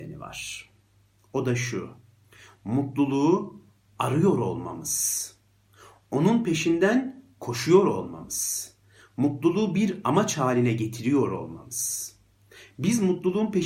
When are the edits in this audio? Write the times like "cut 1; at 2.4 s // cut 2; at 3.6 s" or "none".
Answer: none

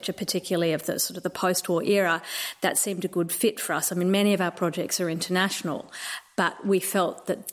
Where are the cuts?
none

